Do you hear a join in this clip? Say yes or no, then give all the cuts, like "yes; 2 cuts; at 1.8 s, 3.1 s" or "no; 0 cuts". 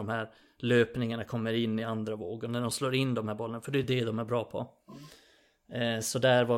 no; 0 cuts